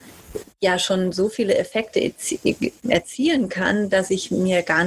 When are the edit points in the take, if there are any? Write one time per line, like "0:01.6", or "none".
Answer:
none

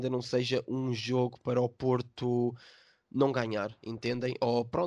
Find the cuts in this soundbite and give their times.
none

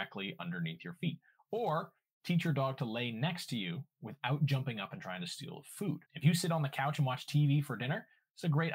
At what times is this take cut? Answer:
0:06.1

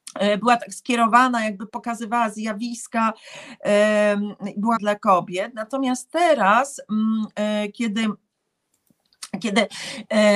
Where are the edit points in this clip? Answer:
0:04.8

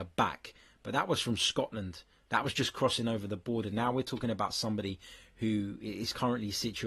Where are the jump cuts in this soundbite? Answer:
none

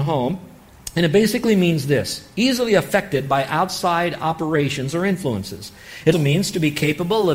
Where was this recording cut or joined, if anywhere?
0:06.1

